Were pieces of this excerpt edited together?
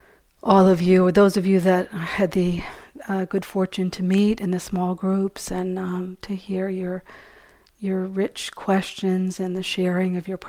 no; 0 cuts

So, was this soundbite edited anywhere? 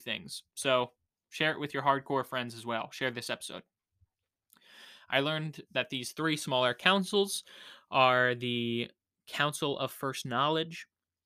no; 0 cuts

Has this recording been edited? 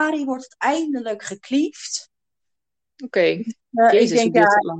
no; 0 cuts

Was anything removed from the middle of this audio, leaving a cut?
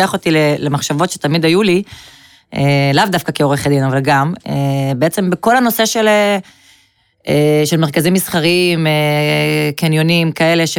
no; 0 cuts

